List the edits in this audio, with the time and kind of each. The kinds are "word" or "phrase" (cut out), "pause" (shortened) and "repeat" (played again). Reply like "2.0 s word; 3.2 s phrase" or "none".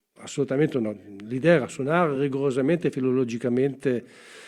none